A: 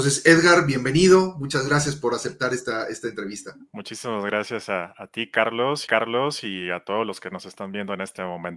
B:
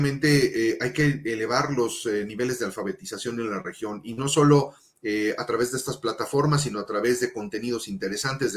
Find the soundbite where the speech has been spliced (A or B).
A